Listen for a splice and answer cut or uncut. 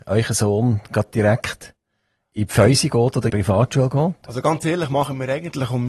cut